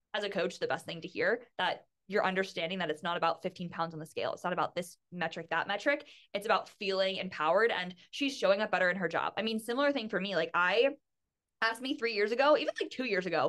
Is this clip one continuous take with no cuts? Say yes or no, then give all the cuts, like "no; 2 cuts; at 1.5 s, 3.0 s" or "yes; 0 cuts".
yes; 0 cuts